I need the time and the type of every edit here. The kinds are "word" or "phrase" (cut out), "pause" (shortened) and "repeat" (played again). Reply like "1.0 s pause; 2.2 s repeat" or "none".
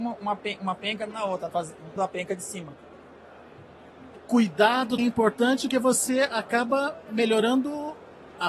1.1 s word; 1.5 s word; 2.0 s word; 4.1 s word; 5.0 s word; 5.7 s word